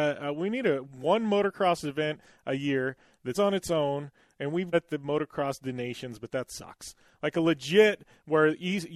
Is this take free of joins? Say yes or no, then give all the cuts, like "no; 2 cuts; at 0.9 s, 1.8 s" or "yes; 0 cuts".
no; 2 cuts; at 3.3 s, 4.7 s